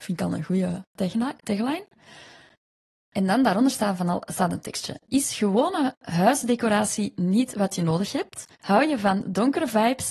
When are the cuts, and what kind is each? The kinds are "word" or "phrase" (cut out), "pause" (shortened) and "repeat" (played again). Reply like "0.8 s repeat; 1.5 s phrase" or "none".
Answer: 8.5 s pause